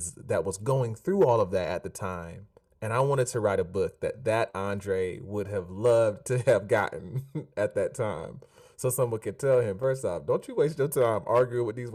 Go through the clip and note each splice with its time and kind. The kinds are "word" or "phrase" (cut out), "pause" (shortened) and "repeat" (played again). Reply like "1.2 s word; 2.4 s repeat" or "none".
none